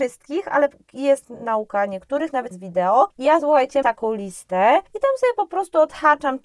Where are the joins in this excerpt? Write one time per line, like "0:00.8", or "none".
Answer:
0:02.5
0:03.8